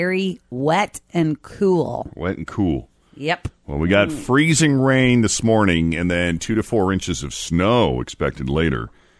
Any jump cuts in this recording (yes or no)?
no